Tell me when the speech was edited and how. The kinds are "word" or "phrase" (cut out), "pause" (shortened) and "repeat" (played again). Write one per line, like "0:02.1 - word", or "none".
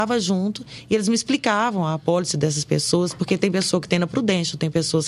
none